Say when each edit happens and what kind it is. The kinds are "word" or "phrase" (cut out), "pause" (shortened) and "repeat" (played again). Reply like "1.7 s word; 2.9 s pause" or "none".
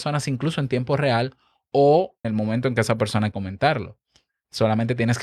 2.2 s word; 3.3 s word

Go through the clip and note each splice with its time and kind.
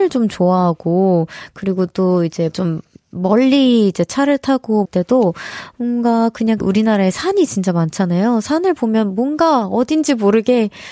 2.5 s word; 4.8 s phrase; 6.6 s word

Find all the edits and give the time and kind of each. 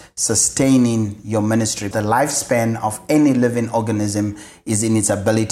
1.9 s word

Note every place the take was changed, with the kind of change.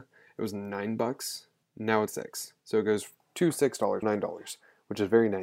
1.6 s pause; 2.1 s word; 2.6 s pause; 3.2 s pause; 4.0 s word

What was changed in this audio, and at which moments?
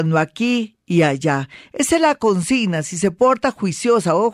none

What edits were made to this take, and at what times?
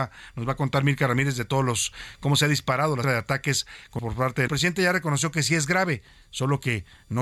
3.0 s word; 4.0 s word; 4.5 s phrase

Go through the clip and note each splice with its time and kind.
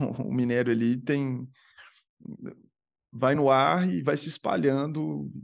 none

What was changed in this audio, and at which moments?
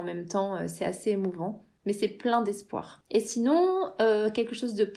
none

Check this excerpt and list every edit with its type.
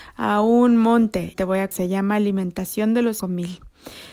1.3 s word; 1.7 s word; 3.2 s word

